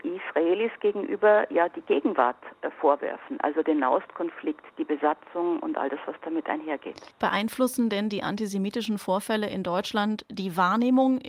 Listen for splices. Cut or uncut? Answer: cut